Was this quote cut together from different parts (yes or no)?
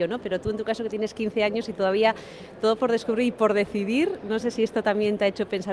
no